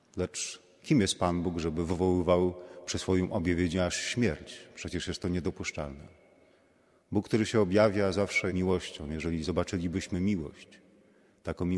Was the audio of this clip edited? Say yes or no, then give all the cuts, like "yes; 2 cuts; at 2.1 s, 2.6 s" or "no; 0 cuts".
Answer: yes; 1 cut; at 8.5 s